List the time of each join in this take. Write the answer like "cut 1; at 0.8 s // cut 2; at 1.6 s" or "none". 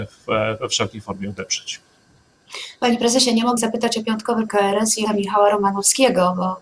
cut 1; at 3.6 s // cut 2; at 4.5 s // cut 3; at 5.0 s